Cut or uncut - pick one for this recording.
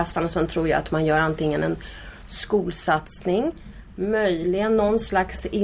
uncut